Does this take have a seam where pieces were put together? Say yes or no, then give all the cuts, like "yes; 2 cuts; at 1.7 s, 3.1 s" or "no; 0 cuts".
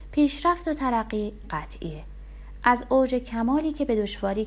yes; 1 cut; at 1.4 s